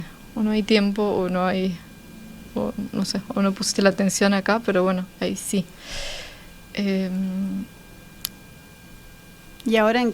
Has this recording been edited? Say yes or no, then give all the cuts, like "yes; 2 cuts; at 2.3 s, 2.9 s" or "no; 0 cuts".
no; 0 cuts